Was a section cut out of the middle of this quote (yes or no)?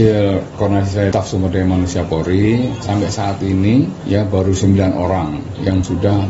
yes